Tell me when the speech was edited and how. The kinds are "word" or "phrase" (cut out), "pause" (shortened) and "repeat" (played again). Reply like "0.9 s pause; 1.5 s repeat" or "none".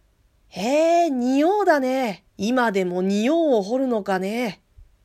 2.3 s pause